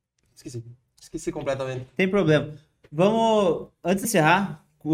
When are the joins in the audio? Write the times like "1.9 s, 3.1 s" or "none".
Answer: 4.0 s